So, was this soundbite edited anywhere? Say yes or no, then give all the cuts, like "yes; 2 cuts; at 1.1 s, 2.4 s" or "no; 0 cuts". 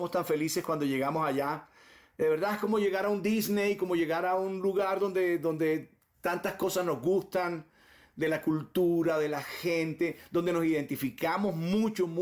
no; 0 cuts